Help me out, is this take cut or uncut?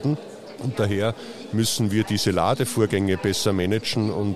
uncut